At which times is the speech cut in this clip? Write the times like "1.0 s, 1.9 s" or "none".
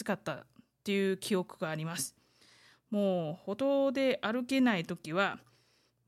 none